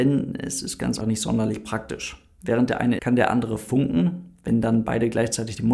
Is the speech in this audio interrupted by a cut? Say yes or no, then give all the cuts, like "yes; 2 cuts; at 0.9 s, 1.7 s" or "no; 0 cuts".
yes; 2 cuts; at 1.0 s, 3.0 s